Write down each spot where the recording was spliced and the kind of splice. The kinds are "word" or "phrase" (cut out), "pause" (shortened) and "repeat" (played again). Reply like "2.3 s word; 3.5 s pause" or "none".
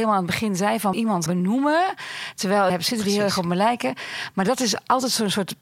0.9 s phrase; 1.3 s word; 2.7 s phrase